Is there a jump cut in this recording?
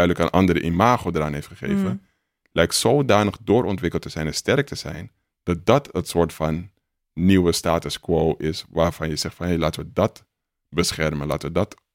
no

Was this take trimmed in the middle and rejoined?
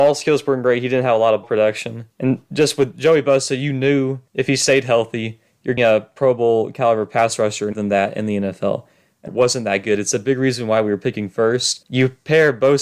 yes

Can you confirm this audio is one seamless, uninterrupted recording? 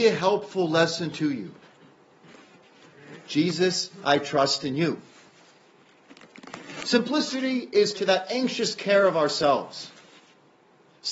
no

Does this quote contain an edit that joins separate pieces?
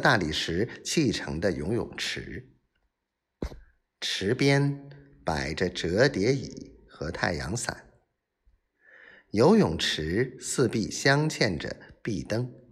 no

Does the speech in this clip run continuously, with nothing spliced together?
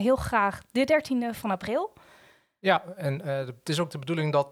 yes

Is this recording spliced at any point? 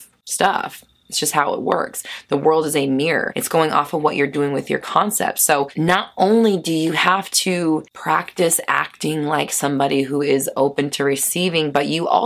no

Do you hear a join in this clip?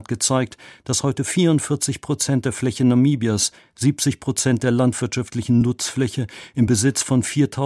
no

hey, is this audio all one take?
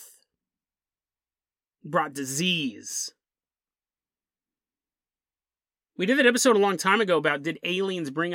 yes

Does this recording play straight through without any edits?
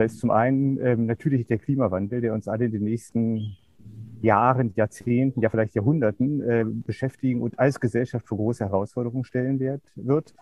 yes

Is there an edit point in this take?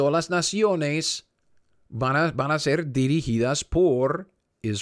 no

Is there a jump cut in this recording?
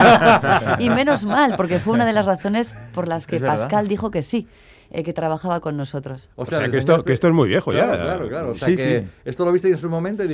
no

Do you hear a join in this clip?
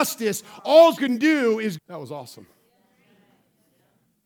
yes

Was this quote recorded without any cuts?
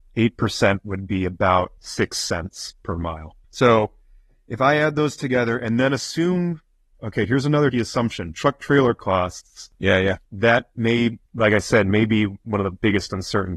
no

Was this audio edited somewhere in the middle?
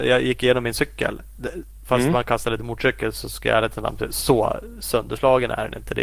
no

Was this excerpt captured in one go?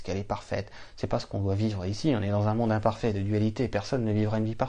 yes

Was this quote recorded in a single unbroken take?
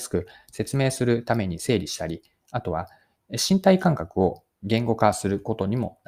yes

